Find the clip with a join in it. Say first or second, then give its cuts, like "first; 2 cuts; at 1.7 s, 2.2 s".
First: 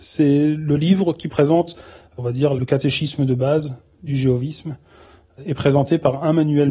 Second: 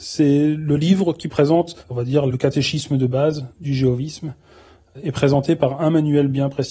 second; 2 cuts; at 1.8 s, 3.5 s